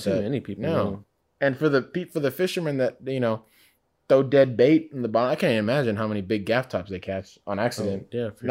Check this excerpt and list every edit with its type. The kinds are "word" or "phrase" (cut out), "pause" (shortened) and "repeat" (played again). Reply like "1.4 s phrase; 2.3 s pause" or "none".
none